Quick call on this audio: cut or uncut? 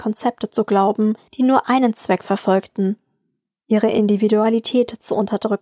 uncut